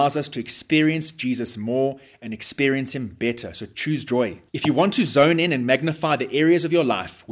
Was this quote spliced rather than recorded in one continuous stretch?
yes; 1 cut; at 4.5 s

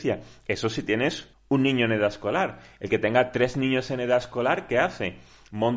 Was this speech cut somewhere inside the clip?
yes; 1 cut; at 1.3 s

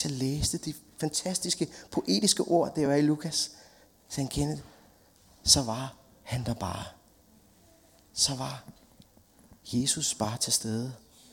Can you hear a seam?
no; 0 cuts

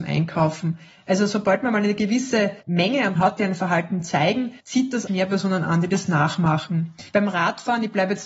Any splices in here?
yes; 5 cuts; at 2.6 s, 3.2 s, 4.6 s, 5.1 s, 7.1 s

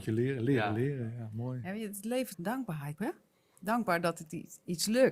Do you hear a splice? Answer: yes; 2 cuts; at 2.3 s, 2.9 s

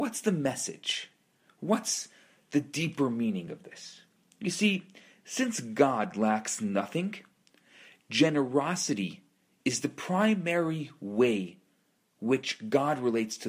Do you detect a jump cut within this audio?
no; 0 cuts

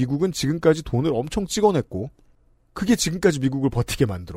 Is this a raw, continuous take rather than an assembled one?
yes; 0 cuts

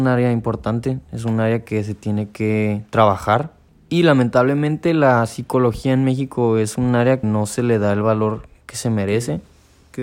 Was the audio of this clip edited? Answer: yes; 2 cuts; at 3.7 s, 7.2 s

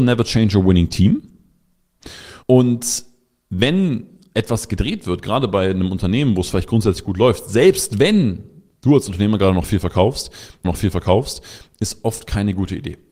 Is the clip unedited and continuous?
no; 2 cuts; at 2.4 s, 10.6 s

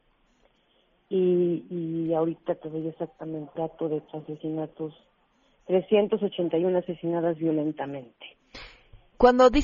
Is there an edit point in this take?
yes; 2 cuts; at 3.5 s, 4.1 s

